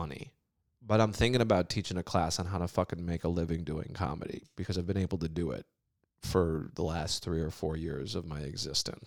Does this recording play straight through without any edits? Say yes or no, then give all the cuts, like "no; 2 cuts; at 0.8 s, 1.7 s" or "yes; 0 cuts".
yes; 0 cuts